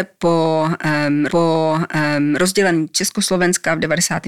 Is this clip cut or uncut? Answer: cut